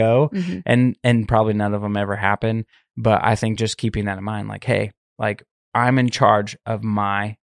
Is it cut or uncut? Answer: uncut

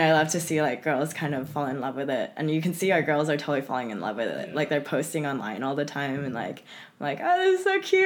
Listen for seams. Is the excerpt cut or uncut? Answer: uncut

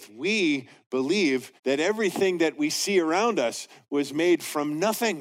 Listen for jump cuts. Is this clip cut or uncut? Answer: cut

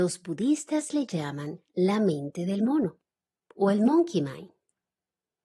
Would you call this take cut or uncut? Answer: uncut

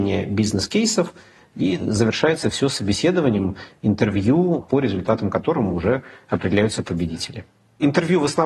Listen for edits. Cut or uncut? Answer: uncut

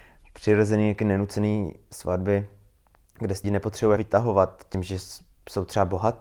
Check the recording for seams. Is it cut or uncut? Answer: cut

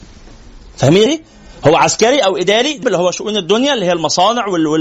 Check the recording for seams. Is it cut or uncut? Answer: cut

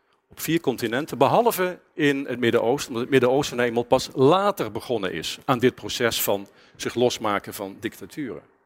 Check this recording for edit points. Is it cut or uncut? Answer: uncut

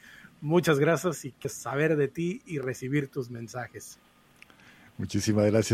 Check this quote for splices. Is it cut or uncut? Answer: cut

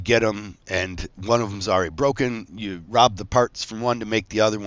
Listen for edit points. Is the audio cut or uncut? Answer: uncut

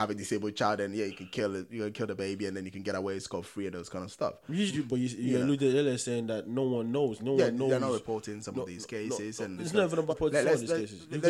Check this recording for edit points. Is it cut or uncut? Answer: cut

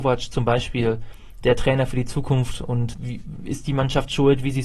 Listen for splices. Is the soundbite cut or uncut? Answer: cut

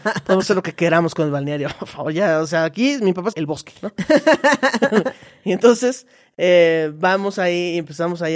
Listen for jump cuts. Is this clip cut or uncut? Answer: cut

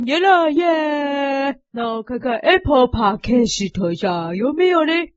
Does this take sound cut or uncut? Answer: cut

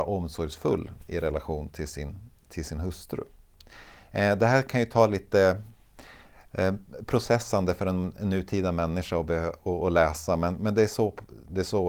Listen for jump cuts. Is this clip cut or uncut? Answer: uncut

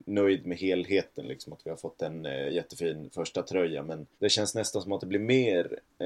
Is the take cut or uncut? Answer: cut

